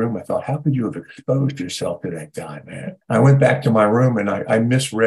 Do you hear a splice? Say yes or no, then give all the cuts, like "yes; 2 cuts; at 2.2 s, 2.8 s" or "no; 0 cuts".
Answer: yes; 1 cut; at 3.0 s